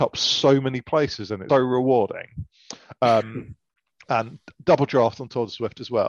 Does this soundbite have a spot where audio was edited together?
yes; 1 cut; at 1.5 s

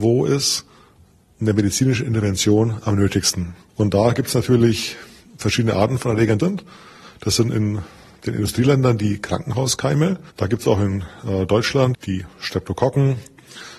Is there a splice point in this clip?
yes; 3 cuts; at 6.4 s, 10.3 s, 11.9 s

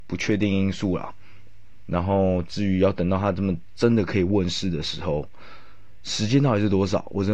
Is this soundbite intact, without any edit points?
yes; 0 cuts

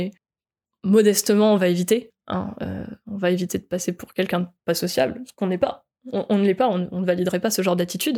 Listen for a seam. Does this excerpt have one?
no; 0 cuts

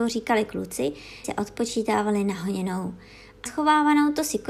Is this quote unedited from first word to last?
no; 2 cuts; at 1.2 s, 3.5 s

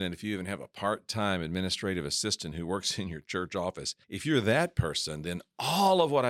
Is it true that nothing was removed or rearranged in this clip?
no; 1 cut; at 4.0 s

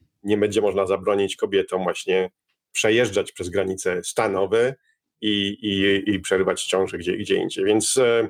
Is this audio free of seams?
yes; 0 cuts

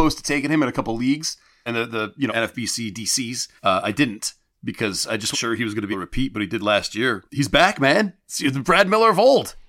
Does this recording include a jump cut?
yes; 6 cuts; at 1.7 s, 2.3 s, 3.6 s, 5.3 s, 5.9 s, 7.3 s

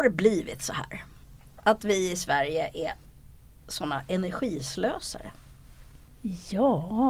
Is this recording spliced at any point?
no; 0 cuts

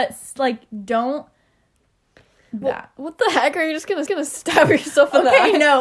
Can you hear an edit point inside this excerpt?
yes; 2 cuts; at 2.6 s, 4.1 s

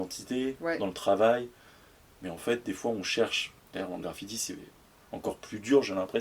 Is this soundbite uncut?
yes; 0 cuts

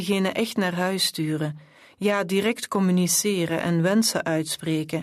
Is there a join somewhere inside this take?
no; 0 cuts

